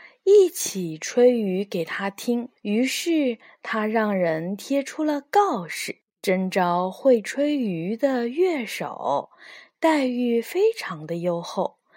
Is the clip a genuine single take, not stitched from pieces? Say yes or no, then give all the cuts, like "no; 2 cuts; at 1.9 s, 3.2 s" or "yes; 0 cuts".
no; 2 cuts; at 2.6 s, 6.1 s